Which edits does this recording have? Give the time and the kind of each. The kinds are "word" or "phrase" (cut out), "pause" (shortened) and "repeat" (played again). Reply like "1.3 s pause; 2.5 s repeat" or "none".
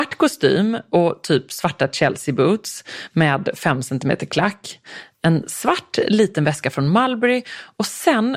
none